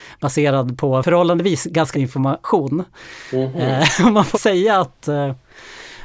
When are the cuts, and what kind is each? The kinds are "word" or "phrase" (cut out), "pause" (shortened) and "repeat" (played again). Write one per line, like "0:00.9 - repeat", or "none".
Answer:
0:01.9 - phrase
0:04.3 - word